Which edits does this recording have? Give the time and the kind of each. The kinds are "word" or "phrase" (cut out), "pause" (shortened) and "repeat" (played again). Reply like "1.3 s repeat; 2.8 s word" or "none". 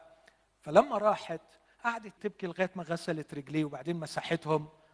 2.2 s word